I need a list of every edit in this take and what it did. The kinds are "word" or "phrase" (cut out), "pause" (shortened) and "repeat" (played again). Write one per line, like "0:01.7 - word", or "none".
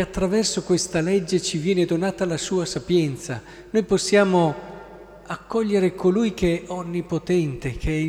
none